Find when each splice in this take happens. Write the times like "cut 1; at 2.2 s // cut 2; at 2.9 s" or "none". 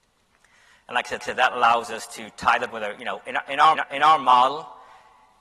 cut 1; at 1.2 s // cut 2; at 2.7 s // cut 3; at 3.7 s